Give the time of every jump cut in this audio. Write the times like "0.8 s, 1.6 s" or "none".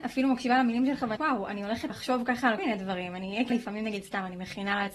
1.2 s, 1.9 s, 2.6 s, 3.5 s